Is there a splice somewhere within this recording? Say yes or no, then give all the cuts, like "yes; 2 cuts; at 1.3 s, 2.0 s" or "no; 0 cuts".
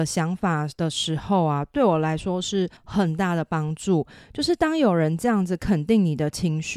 yes; 1 cut; at 2.8 s